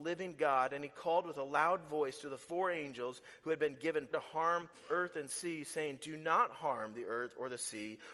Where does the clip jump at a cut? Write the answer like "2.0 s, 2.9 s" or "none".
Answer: 4.1 s